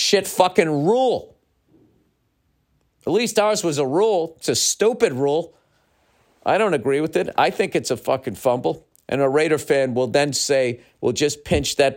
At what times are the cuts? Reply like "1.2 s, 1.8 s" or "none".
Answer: none